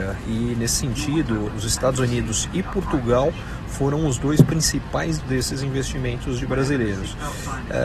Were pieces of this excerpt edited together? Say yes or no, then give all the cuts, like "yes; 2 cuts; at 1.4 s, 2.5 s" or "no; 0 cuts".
yes; 2 cuts; at 1.5 s, 5.2 s